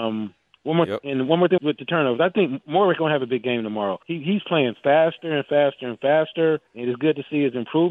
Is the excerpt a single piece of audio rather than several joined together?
no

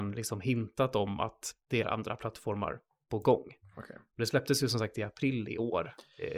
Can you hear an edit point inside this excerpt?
yes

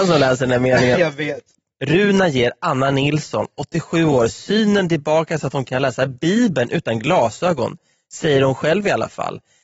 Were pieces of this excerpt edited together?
no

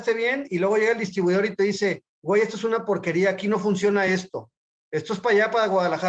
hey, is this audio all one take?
yes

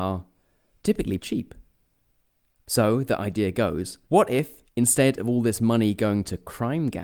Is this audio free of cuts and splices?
no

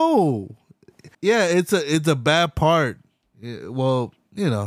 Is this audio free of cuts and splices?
no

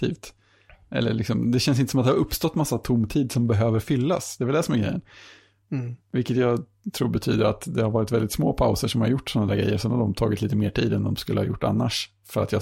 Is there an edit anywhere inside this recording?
no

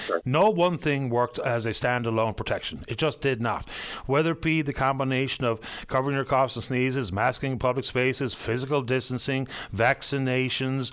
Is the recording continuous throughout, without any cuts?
yes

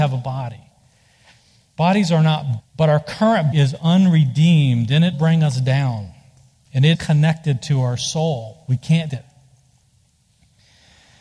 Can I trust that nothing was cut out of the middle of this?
no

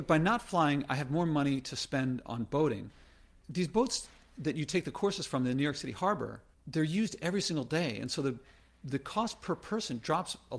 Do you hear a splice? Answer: no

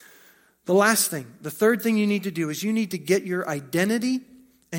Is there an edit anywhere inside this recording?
no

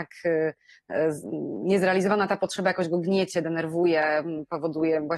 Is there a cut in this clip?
no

